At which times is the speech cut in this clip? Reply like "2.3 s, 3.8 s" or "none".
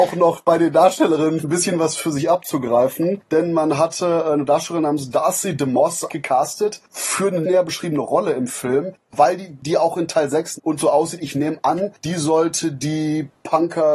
1.4 s, 6.1 s, 7.4 s, 10.6 s